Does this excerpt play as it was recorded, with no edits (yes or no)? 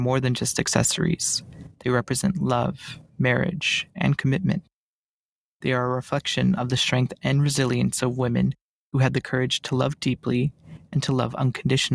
yes